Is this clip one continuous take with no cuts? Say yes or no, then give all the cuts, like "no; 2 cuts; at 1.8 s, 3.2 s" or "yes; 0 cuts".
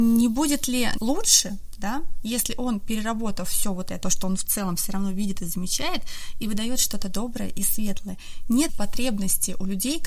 no; 3 cuts; at 1.0 s, 4.0 s, 8.7 s